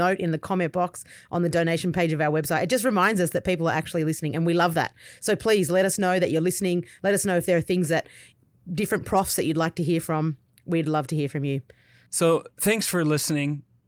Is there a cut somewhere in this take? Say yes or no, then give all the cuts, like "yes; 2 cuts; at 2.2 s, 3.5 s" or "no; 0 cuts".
no; 0 cuts